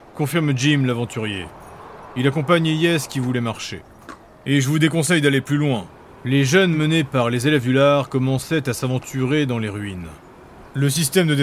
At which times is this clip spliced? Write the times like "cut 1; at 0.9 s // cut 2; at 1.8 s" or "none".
none